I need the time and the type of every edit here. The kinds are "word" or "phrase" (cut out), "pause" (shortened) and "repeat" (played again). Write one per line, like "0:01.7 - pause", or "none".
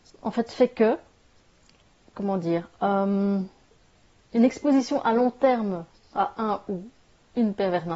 0:06.0 - pause

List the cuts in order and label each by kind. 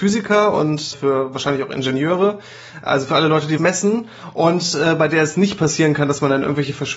0:00.9 - word
0:03.6 - word

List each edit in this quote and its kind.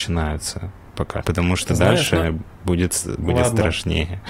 0:01.2 - word

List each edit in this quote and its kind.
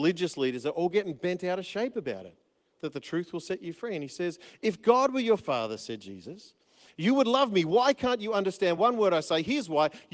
none

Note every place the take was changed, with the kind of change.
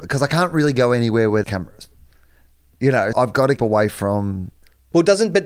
0:01.4 - word
0:03.1 - word
0:03.6 - word

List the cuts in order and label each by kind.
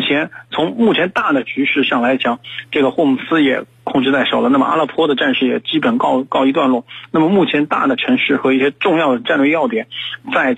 none

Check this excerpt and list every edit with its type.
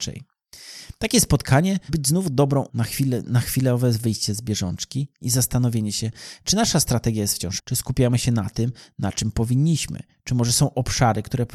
0:01.9 - word
0:02.7 - word
0:07.6 - word

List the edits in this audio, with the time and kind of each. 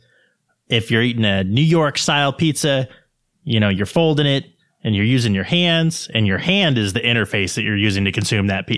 none

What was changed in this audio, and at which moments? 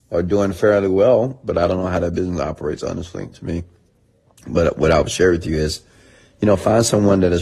0:03.3 - word

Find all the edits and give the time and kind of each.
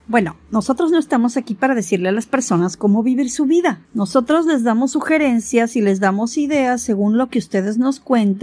0:03.8 - pause

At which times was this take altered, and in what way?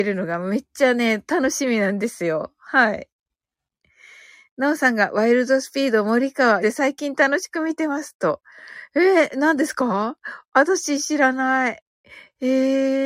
0:06.6 - word

